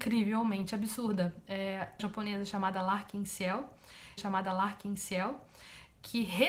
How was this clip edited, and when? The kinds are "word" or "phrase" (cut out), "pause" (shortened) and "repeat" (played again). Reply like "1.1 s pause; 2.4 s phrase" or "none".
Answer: 2.0 s phrase; 4.2 s repeat